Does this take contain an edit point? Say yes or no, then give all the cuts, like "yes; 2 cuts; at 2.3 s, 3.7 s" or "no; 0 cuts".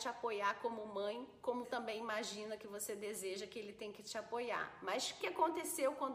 yes; 2 cuts; at 1.6 s, 5.2 s